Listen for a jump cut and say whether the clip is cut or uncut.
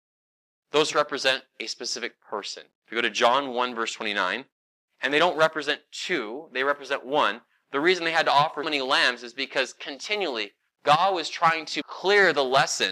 cut